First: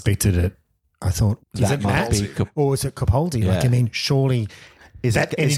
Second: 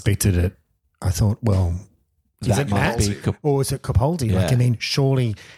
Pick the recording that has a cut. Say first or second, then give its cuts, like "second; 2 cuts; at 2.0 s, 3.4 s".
first; 1 cut; at 1.4 s